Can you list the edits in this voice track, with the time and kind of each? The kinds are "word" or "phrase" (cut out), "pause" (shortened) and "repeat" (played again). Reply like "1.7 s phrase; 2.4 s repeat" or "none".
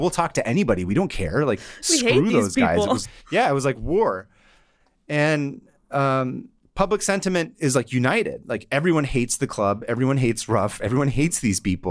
3.0 s word